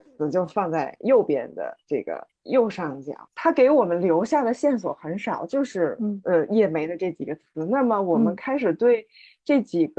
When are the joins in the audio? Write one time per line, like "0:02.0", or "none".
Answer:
0:03.3